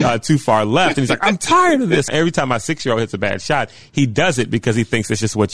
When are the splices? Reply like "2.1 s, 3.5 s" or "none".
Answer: 2.1 s